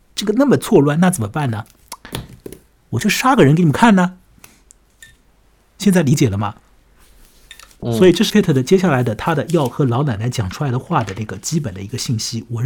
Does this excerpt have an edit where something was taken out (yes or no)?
yes